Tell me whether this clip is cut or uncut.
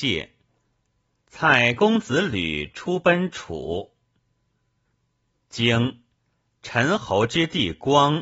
uncut